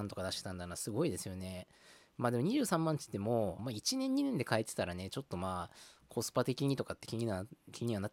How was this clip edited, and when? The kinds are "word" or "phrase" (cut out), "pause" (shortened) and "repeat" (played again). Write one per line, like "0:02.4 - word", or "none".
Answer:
0:03.6 - phrase

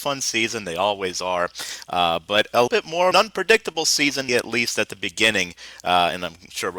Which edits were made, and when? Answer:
0:02.7 - word
0:03.1 - phrase
0:04.3 - word

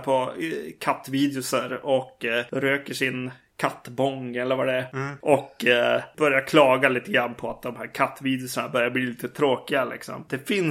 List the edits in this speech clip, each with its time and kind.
none

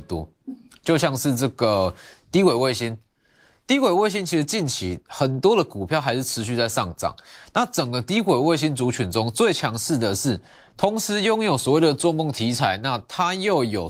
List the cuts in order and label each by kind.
none

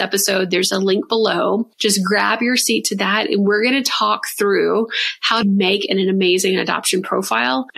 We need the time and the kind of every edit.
0:05.4 - word

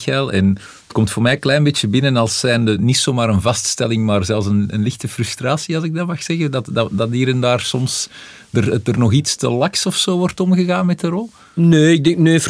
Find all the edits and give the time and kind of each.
none

